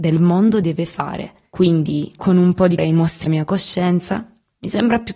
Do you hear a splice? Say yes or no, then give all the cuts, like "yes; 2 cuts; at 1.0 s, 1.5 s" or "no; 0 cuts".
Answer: yes; 3 cuts; at 2.2 s, 2.8 s, 3.3 s